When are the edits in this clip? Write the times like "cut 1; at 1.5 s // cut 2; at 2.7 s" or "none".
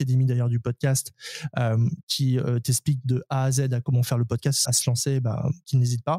cut 1; at 4.7 s